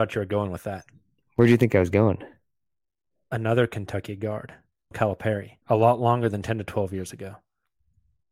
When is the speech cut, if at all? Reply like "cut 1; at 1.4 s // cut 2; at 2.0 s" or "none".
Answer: cut 1; at 4.9 s // cut 2; at 5.6 s